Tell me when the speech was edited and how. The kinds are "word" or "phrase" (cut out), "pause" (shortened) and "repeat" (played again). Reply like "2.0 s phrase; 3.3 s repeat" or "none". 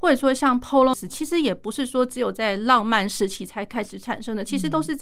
0.9 s phrase